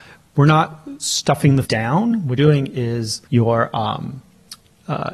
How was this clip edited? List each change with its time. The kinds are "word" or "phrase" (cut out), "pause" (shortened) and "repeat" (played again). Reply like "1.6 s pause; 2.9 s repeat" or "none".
1.6 s word; 2.4 s word; 3.3 s pause